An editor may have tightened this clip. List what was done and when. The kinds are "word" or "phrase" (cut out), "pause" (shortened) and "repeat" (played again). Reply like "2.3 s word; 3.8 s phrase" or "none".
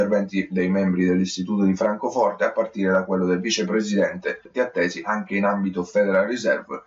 4.5 s word